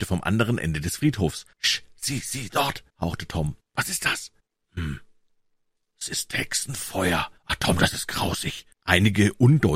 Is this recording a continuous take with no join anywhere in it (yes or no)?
no